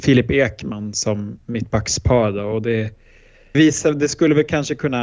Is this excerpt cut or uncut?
cut